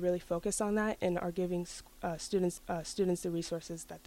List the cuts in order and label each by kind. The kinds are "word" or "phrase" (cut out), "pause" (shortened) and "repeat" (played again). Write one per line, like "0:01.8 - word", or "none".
0:02.6 - repeat